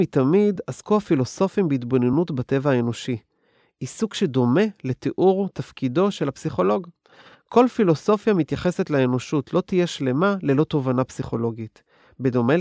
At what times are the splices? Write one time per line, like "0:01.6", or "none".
none